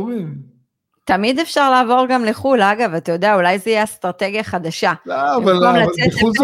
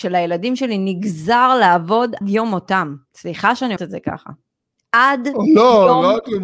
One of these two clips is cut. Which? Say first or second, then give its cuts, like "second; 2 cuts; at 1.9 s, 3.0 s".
second; 3 cuts; at 2.2 s, 3.1 s, 3.8 s